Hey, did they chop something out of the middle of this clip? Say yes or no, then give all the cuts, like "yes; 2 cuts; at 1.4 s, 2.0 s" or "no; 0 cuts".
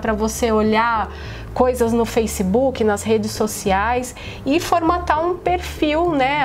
no; 0 cuts